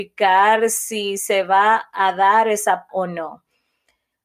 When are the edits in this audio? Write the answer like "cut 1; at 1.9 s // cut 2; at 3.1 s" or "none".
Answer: cut 1; at 2.9 s